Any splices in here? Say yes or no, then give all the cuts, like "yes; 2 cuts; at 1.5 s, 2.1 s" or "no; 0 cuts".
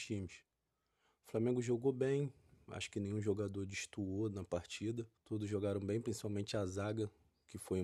yes; 1 cut; at 5.2 s